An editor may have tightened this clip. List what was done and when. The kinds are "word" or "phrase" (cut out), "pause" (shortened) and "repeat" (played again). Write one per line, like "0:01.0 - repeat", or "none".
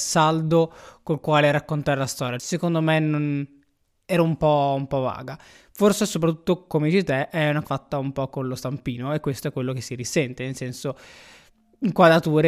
0:07.6 - word